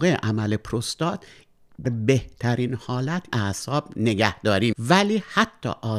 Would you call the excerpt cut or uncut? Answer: cut